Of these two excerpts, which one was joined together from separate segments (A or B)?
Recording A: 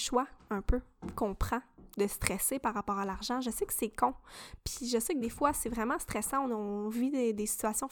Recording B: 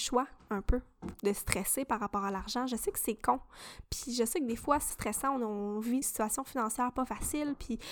B